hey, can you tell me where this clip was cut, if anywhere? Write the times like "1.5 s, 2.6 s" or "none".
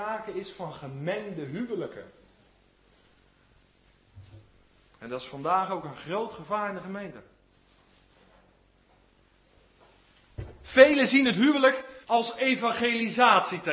12.0 s